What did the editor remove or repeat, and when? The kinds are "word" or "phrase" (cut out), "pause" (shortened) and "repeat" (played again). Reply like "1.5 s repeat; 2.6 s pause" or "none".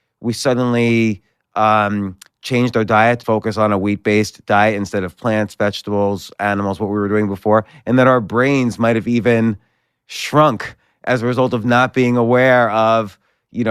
3.2 s word